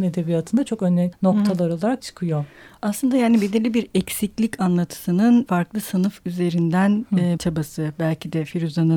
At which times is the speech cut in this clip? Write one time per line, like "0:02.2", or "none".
0:01.1
0:02.0
0:05.5
0:07.4